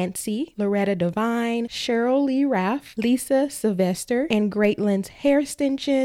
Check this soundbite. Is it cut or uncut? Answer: uncut